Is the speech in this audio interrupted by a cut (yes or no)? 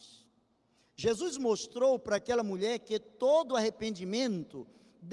no